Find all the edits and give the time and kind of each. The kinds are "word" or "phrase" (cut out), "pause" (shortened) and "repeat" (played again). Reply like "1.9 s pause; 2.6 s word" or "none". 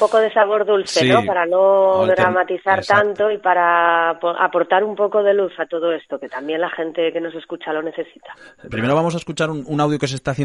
none